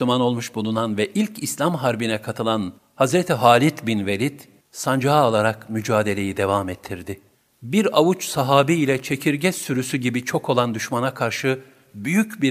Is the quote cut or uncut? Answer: cut